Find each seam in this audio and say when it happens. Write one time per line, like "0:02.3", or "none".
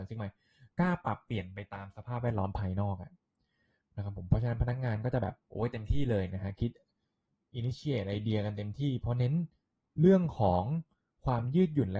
0:05.4